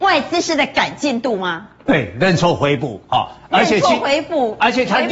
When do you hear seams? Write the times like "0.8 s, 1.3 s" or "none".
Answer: none